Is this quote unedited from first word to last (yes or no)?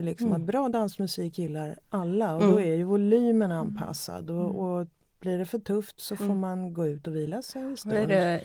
yes